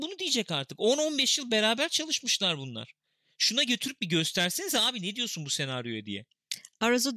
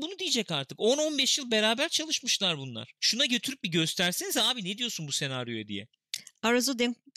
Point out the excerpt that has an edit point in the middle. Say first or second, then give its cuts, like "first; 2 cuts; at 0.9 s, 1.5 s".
second; 1 cut; at 3.0 s